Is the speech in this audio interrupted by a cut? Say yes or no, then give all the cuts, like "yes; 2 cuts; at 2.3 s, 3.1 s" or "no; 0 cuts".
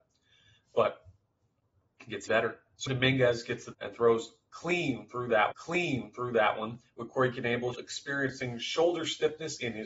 yes; 5 cuts; at 2.3 s, 2.9 s, 3.7 s, 5.5 s, 7.7 s